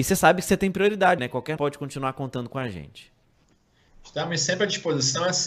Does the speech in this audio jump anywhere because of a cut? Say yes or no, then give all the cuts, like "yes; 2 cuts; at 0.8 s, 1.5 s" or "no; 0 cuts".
yes; 2 cuts; at 1.2 s, 1.6 s